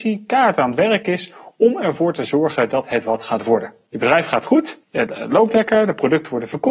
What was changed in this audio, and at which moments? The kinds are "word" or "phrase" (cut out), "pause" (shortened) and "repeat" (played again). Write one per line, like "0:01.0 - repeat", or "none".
0:04.8 - pause